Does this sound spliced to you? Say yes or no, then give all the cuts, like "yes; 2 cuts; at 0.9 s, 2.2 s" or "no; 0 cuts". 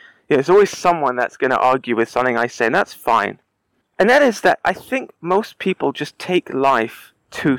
yes; 1 cut; at 3.8 s